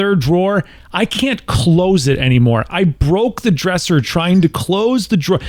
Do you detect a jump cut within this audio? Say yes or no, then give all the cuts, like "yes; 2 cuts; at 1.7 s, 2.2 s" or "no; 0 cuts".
no; 0 cuts